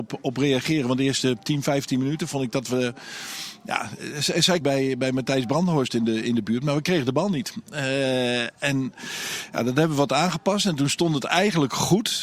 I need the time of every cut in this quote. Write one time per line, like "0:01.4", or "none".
0:04.6